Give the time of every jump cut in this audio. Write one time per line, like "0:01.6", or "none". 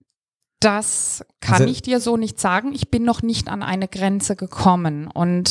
none